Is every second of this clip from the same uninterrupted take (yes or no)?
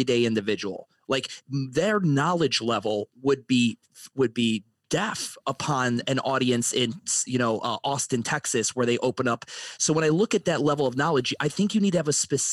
yes